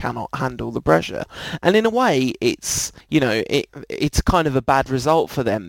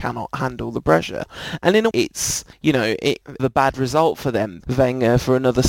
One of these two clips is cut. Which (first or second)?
second